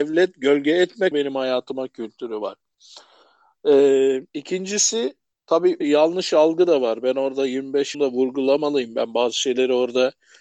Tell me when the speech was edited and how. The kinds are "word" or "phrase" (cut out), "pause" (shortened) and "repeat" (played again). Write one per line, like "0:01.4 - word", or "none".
0:01.1 - word
0:04.3 - pause
0:05.8 - word
0:07.9 - phrase

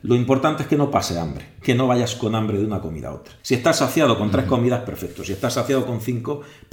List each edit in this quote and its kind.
0:03.4 - pause

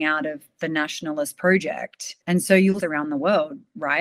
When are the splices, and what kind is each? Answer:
0:02.2 - pause
0:02.8 - phrase

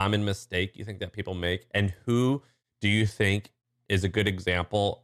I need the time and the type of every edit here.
none

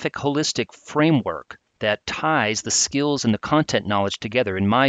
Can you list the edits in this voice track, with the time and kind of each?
none

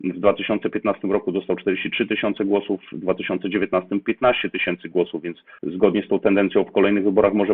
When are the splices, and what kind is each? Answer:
0:05.6 - pause

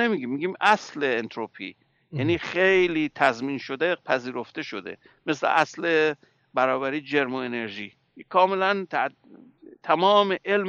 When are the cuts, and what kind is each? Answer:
none

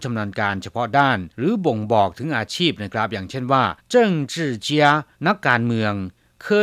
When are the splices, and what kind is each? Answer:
0:01.3 - pause
0:03.8 - pause
0:05.1 - pause

